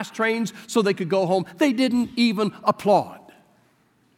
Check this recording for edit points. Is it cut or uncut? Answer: uncut